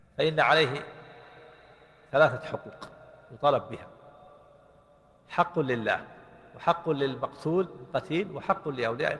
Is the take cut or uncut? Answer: uncut